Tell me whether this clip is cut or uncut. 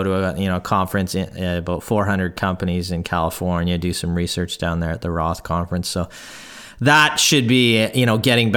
uncut